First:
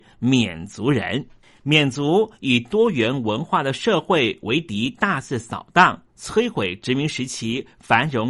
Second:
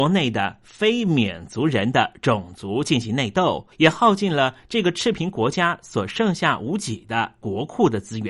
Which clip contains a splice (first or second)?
second